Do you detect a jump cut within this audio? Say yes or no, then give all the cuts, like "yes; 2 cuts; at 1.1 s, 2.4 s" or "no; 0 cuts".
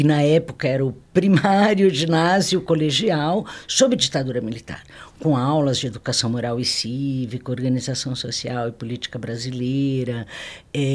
no; 0 cuts